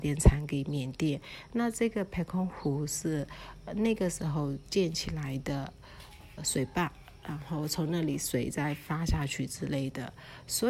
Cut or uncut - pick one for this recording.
cut